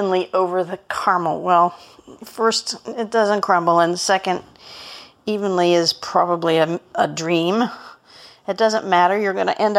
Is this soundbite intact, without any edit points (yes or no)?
yes